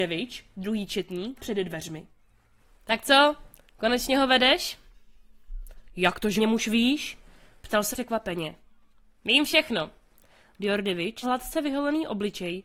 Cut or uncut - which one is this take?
cut